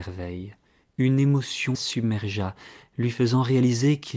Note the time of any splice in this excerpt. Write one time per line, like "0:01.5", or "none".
0:01.7